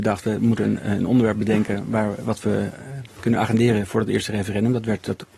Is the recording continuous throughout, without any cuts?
yes; 0 cuts

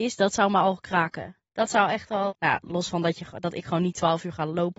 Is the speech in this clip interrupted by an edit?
yes; 2 cuts; at 1.4 s, 2.3 s

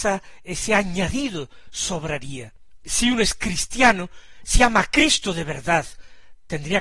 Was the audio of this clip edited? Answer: no; 0 cuts

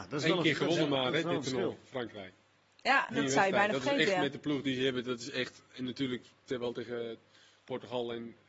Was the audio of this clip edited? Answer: yes; 1 cut; at 3.1 s

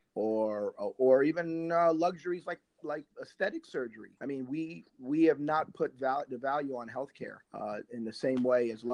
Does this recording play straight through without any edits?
no; 4 cuts; at 3.1 s, 4.2 s, 4.9 s, 7.4 s

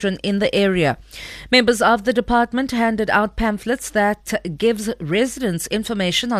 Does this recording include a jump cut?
no; 0 cuts

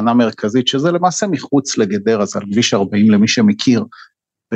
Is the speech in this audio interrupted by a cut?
no; 0 cuts

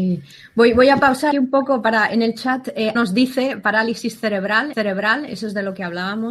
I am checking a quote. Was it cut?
yes; 3 cuts; at 1.3 s, 2.9 s, 4.7 s

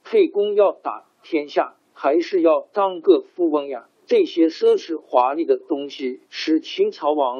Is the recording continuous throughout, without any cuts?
no; 3 cuts; at 1.8 s, 3.9 s, 6.2 s

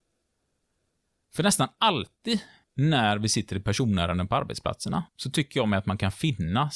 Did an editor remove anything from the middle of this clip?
yes; 1 cut; at 5.1 s

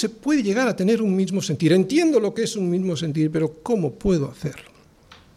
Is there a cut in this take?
no; 0 cuts

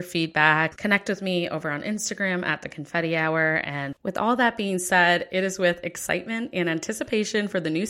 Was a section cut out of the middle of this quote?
no; 0 cuts

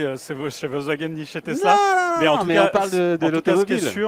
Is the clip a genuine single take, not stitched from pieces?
yes; 0 cuts

